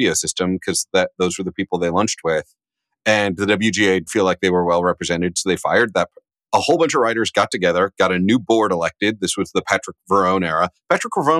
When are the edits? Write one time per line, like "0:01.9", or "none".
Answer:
0:04.1